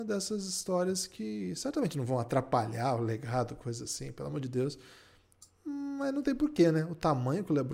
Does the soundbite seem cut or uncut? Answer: uncut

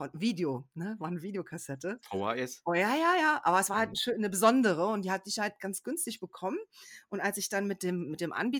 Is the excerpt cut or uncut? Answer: uncut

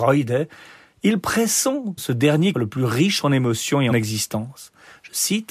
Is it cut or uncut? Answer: cut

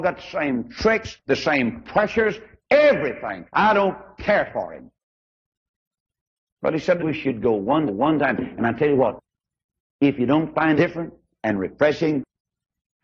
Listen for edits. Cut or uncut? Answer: cut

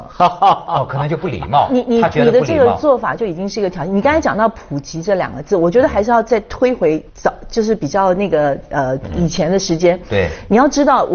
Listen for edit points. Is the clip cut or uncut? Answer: cut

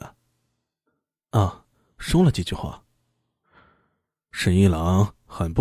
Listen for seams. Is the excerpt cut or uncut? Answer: uncut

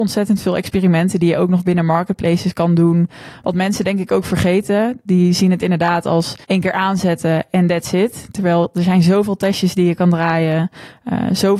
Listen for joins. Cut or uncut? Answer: cut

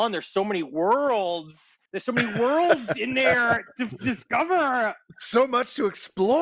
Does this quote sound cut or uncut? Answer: cut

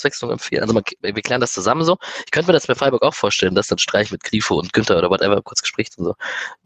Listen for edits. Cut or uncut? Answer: uncut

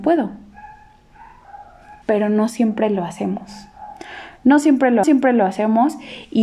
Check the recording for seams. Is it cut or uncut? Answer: cut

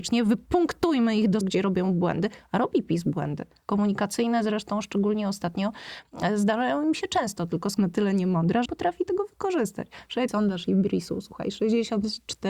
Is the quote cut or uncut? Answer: cut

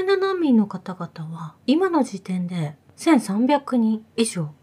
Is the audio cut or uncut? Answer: uncut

